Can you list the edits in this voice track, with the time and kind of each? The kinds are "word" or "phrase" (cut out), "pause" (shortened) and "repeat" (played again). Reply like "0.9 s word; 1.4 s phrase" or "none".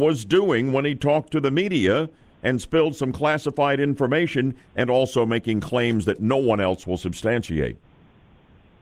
none